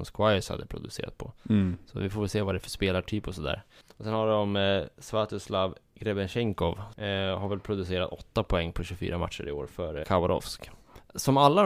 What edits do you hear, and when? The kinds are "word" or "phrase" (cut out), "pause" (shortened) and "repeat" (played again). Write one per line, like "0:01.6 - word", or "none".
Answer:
0:10.0 - word